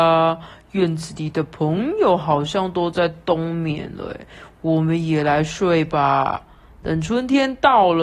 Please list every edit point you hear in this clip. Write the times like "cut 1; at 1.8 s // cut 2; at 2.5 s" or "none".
none